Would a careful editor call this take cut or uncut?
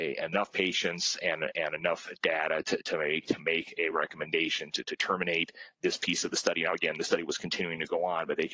uncut